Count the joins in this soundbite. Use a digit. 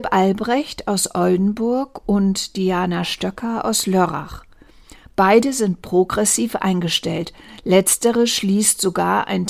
0